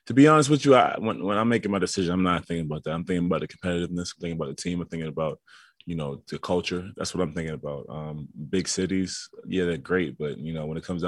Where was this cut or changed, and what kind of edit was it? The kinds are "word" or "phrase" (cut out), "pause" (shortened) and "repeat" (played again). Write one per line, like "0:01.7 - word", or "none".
none